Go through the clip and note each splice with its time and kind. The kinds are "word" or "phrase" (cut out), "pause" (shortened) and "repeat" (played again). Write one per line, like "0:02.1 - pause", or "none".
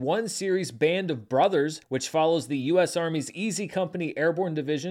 0:01.8 - pause

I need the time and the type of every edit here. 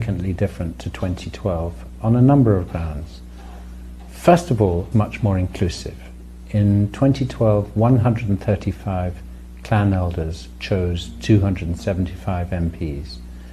0:04.9 - word

